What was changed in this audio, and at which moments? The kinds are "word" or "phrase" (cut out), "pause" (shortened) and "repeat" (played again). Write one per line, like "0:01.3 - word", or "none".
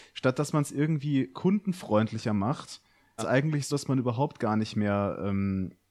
0:03.2 - phrase
0:03.7 - word